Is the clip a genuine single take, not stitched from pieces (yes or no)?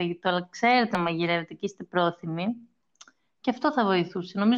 yes